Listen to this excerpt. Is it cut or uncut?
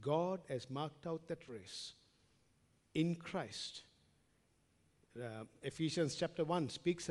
uncut